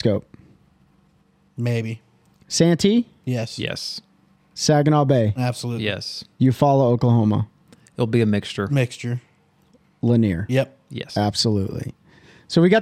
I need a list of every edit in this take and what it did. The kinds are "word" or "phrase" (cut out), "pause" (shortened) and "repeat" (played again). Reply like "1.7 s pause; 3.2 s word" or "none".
none